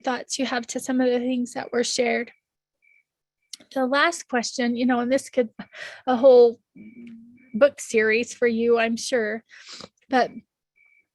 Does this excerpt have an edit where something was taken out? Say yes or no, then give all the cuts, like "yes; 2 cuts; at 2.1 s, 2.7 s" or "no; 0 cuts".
yes; 1 cut; at 5.5 s